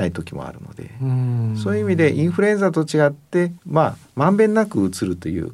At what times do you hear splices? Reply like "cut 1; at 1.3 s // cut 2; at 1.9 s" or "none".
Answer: cut 1; at 3.6 s